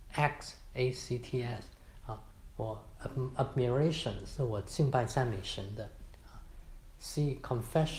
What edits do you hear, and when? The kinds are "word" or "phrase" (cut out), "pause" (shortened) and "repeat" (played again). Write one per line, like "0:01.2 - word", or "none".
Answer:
none